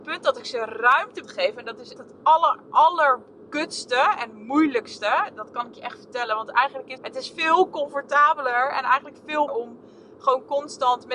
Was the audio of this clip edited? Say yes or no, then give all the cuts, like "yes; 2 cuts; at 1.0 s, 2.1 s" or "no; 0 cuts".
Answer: yes; 4 cuts; at 1.2 s, 2.0 s, 7.0 s, 9.5 s